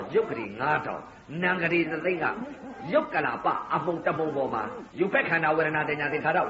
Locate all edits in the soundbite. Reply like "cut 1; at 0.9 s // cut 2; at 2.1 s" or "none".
cut 1; at 4.9 s